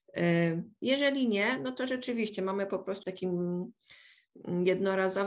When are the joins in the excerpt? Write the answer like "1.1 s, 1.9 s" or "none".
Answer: 3.0 s